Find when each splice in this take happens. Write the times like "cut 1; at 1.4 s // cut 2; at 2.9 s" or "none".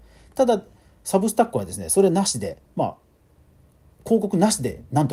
cut 1; at 2.7 s